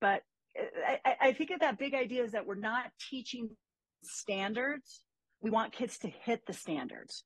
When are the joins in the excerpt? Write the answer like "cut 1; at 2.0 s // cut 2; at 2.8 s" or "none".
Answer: none